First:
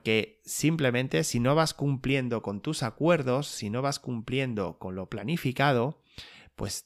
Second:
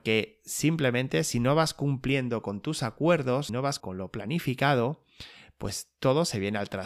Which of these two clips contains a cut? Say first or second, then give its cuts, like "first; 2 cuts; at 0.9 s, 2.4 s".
second; 2 cuts; at 3.5 s, 3.8 s